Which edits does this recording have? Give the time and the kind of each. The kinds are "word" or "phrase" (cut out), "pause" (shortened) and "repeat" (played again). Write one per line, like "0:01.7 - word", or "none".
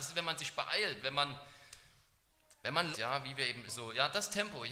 0:02.9 - word
0:03.7 - phrase